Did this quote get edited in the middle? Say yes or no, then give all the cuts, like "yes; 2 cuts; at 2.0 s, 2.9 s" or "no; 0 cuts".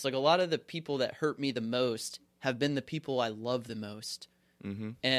no; 0 cuts